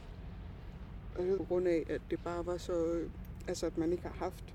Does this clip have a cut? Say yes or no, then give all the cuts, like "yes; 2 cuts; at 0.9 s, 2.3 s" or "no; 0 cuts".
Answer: yes; 1 cut; at 1.4 s